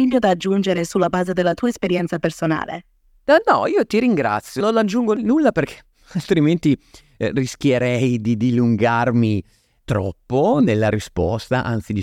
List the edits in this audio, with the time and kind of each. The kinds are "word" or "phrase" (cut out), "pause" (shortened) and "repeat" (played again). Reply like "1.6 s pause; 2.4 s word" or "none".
none